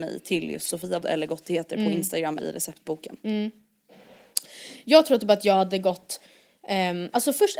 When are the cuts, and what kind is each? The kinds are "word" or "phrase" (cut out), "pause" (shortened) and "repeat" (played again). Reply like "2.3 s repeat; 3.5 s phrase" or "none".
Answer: 1.0 s word; 2.4 s word